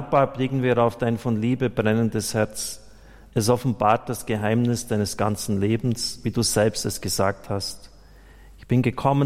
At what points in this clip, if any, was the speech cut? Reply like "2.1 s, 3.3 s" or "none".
none